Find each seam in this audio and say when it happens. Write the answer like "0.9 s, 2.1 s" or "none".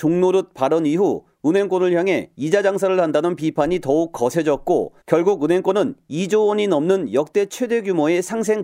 5.0 s